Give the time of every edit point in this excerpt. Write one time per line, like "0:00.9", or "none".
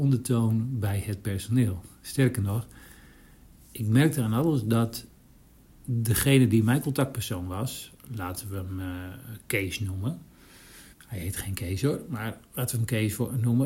0:10.9